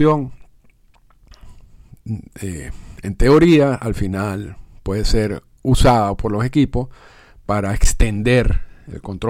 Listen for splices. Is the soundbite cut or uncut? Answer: uncut